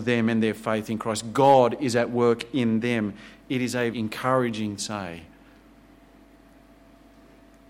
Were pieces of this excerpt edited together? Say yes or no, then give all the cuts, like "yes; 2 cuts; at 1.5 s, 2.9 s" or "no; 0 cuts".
yes; 2 cuts; at 3.9 s, 4.8 s